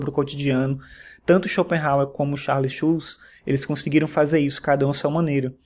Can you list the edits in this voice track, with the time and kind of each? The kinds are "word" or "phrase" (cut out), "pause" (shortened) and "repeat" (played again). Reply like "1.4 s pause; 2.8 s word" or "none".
none